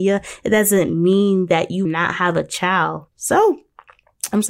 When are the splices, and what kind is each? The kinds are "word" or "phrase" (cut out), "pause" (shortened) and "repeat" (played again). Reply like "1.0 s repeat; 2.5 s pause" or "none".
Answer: 1.9 s word; 3.1 s pause